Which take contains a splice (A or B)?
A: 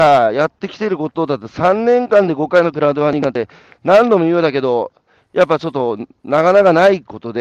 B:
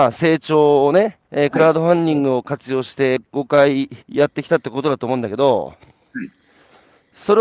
B